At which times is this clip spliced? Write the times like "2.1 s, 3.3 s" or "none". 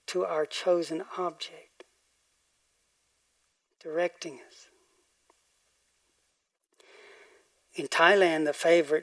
none